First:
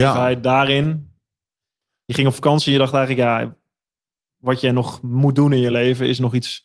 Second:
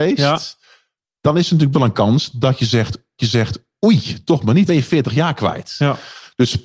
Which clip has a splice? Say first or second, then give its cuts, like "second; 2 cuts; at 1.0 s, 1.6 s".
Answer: second; 3 cuts; at 1.7 s, 3.2 s, 4.7 s